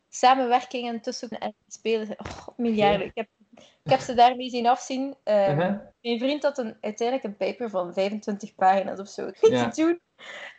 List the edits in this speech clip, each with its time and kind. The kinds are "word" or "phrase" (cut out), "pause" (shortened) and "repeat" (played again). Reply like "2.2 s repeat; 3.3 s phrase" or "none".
1.3 s word; 9.3 s word